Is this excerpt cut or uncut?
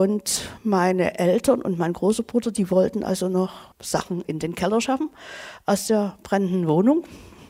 cut